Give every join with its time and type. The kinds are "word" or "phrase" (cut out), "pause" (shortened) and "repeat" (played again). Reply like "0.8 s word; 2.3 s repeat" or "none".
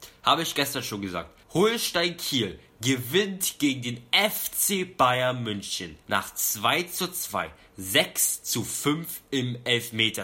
1.4 s pause; 6.0 s pause